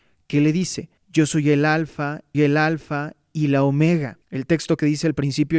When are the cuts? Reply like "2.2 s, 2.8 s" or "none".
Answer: 1.0 s, 2.3 s, 4.2 s